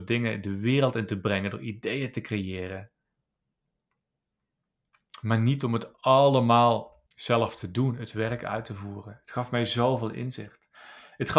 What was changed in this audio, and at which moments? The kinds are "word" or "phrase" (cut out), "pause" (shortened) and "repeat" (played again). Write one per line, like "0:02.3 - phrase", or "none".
0:07.1 - pause